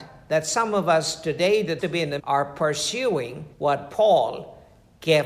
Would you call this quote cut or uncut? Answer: cut